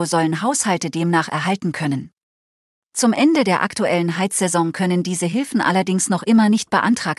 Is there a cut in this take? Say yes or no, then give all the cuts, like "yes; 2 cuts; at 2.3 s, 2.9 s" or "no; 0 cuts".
no; 0 cuts